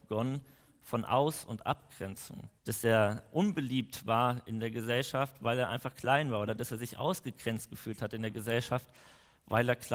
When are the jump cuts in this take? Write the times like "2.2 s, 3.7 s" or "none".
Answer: 2.6 s